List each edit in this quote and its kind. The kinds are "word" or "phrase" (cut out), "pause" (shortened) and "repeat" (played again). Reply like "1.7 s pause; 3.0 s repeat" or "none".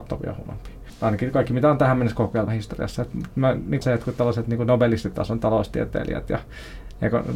2.5 s word; 3.8 s phrase